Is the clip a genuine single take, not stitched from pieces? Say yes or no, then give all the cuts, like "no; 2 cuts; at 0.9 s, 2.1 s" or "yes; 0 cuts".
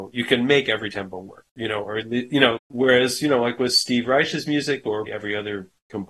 no; 3 cuts; at 1.5 s, 2.6 s, 5.1 s